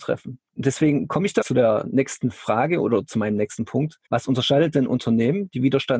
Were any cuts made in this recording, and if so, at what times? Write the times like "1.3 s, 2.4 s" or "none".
1.4 s, 4.1 s